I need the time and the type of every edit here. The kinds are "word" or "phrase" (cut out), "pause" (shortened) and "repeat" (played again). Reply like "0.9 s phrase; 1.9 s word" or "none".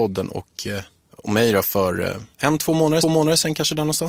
2.3 s pause; 3.0 s repeat